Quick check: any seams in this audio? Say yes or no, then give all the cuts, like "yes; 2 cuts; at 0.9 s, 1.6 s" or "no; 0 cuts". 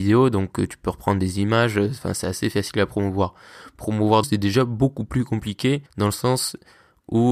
yes; 2 cuts; at 4.2 s, 5.9 s